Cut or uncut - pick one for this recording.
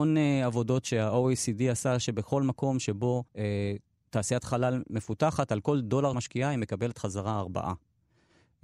cut